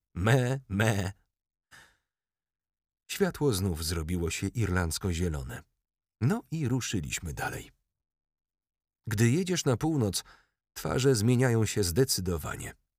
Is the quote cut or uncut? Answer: uncut